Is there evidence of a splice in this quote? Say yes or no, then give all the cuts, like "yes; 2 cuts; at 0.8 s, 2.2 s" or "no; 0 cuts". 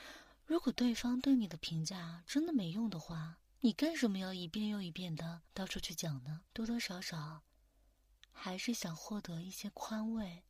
yes; 3 cuts; at 3.5 s, 5.5 s, 6.5 s